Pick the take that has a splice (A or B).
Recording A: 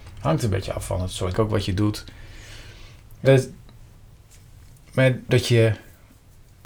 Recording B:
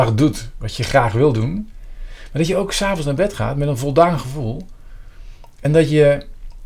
A